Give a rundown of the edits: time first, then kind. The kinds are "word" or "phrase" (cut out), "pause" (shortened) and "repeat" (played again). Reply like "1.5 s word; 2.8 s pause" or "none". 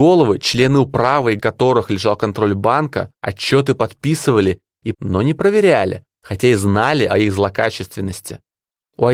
1.4 s phrase; 3.2 s pause; 4.9 s word